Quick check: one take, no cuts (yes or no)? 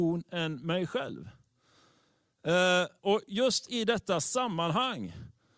no